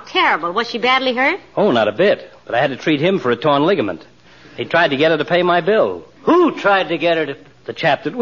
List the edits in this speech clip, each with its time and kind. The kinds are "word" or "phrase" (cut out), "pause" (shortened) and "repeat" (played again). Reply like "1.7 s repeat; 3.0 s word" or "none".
none

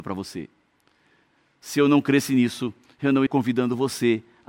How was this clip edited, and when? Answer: 3.3 s word

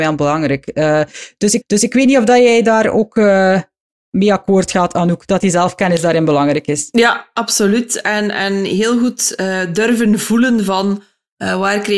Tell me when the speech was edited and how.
1.6 s repeat

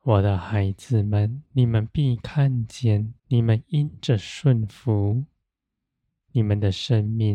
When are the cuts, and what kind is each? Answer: 1.5 s pause; 3.2 s pause

